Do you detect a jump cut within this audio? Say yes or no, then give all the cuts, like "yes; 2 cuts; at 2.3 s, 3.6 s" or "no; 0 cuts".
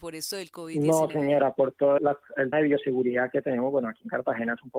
yes; 3 cuts; at 1.1 s, 2.0 s, 2.5 s